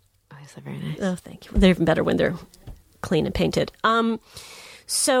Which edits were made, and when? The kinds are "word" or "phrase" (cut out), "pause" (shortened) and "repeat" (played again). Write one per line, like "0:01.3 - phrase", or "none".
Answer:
none